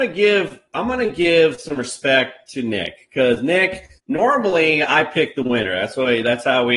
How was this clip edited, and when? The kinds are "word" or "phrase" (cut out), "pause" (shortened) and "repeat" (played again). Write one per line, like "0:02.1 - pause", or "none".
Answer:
0:04.0 - pause